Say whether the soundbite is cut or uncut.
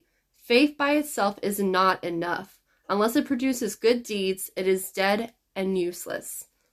uncut